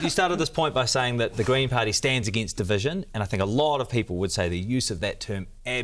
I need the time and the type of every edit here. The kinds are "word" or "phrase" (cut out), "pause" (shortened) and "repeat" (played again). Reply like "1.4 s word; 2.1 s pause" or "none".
none